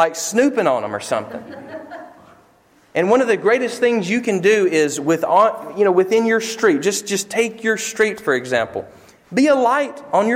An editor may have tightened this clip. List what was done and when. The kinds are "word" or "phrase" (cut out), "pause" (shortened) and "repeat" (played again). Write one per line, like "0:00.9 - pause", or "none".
none